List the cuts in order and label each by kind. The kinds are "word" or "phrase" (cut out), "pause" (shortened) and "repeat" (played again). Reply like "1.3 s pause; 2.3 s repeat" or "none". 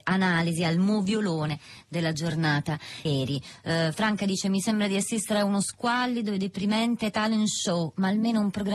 3.1 s word